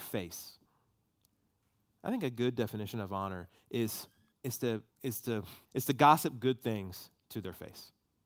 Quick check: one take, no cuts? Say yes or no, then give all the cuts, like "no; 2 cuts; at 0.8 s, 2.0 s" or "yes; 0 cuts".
no; 3 cuts; at 4.3 s, 4.9 s, 5.6 s